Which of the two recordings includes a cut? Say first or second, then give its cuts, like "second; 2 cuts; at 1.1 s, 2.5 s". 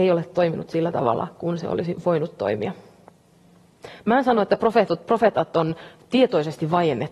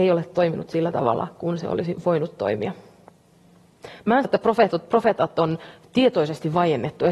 second; 1 cut; at 4.2 s